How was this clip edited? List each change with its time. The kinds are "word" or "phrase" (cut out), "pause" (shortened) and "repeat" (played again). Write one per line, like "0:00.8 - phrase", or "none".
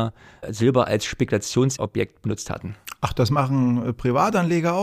none